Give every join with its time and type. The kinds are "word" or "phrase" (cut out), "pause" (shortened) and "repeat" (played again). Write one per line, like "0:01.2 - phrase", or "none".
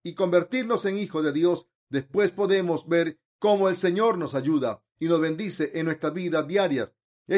none